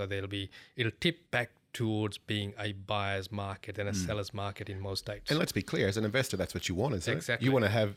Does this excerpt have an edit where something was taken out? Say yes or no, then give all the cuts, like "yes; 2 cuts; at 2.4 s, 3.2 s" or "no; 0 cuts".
yes; 1 cut; at 1.3 s